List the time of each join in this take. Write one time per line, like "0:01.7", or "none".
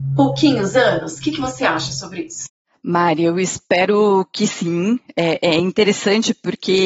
none